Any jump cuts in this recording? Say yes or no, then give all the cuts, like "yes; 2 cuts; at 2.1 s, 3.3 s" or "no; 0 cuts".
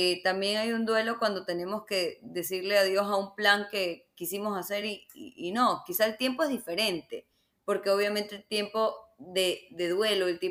no; 0 cuts